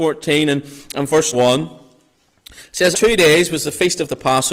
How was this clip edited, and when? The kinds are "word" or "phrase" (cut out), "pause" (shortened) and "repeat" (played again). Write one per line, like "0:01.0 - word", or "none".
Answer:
0:01.3 - word
0:02.9 - word